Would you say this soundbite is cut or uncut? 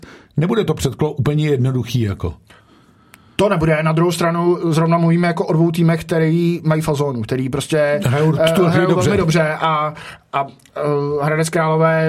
uncut